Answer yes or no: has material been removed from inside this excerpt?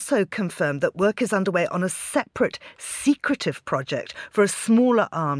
no